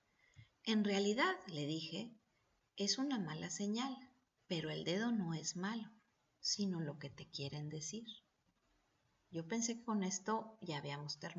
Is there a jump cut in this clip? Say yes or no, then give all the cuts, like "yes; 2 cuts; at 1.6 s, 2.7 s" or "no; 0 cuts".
no; 0 cuts